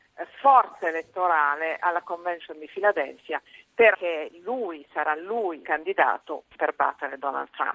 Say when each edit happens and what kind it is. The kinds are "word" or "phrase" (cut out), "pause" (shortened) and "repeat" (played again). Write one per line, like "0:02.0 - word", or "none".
0:03.9 - word
0:05.6 - word
0:06.5 - word